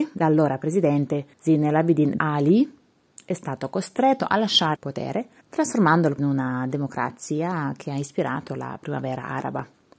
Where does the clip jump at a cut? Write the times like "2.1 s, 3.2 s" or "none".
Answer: 1.3 s, 2.2 s, 4.8 s, 5.4 s, 6.2 s